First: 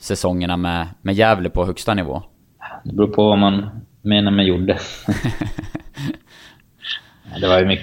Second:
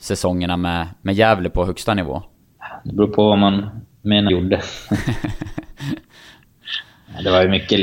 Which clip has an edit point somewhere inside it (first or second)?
second